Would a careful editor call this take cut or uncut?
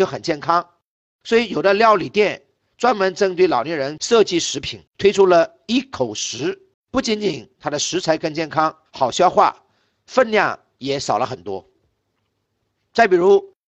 cut